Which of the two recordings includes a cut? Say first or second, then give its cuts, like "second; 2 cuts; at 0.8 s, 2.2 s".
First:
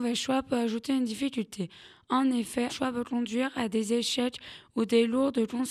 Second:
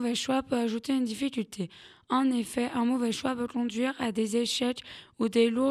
first; 1 cut; at 2.7 s